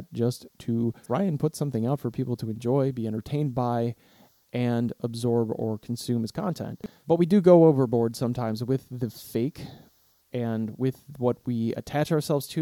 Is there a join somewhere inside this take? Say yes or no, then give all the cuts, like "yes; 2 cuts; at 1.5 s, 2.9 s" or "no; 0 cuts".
no; 0 cuts